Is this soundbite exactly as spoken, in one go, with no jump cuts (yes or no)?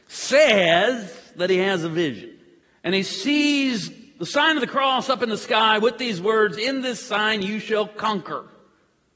no